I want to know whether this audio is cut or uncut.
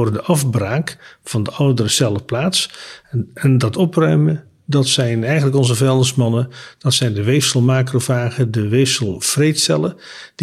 uncut